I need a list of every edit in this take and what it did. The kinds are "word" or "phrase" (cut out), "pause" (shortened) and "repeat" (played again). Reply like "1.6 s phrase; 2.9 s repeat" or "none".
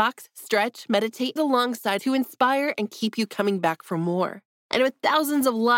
1.4 s phrase; 2.0 s word